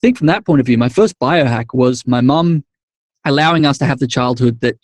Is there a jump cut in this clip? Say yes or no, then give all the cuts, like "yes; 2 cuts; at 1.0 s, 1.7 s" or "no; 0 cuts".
no; 0 cuts